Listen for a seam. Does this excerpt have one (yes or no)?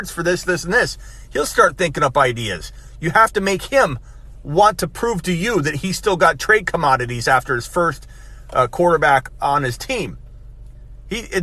yes